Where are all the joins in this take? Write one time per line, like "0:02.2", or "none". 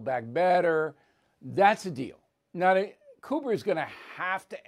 none